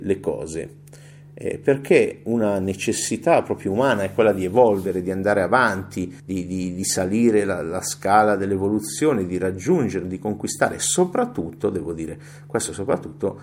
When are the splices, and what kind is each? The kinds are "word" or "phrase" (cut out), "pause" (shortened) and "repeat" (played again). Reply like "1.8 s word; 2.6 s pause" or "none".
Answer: 6.2 s pause